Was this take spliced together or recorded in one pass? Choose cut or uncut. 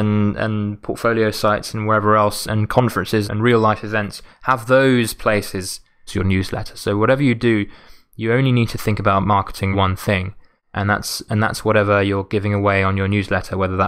cut